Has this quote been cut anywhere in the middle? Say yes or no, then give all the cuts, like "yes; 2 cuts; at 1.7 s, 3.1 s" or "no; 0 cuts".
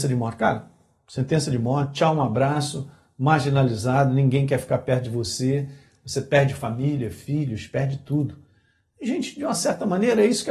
no; 0 cuts